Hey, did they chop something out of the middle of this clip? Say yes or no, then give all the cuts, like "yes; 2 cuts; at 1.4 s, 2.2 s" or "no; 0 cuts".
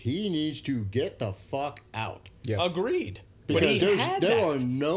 yes; 1 cut; at 3.8 s